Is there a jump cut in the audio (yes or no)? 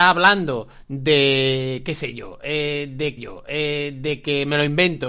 yes